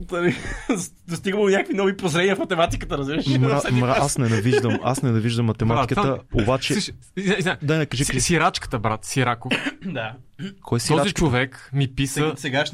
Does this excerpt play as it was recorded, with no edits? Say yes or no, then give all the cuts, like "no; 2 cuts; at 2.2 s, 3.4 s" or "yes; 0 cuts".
yes; 0 cuts